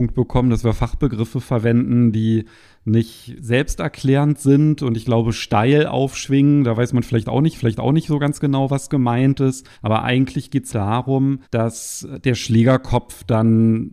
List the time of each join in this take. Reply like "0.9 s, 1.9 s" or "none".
3.4 s, 7.5 s, 9.7 s, 10.7 s, 11.4 s